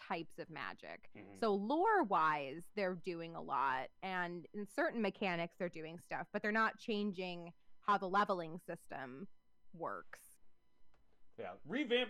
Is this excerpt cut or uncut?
uncut